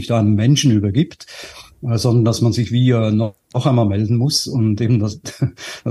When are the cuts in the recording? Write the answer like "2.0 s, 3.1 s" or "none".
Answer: none